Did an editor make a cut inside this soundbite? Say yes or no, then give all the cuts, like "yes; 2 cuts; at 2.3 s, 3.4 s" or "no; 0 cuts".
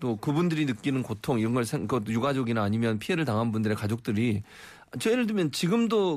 no; 0 cuts